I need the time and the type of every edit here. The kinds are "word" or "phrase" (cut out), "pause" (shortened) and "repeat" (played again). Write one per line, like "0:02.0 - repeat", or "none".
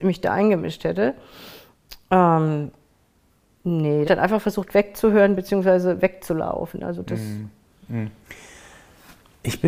0:04.0 - phrase